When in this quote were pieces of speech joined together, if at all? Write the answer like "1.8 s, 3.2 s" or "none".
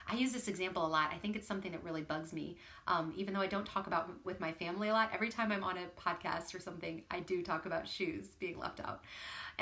4.2 s